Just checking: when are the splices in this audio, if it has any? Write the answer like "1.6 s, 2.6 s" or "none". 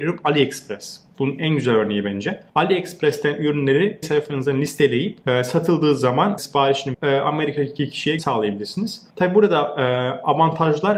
2.5 s, 4.0 s, 5.2 s, 6.4 s, 6.9 s, 8.2 s, 9.1 s